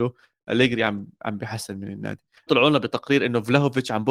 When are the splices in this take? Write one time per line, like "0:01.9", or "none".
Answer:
0:02.5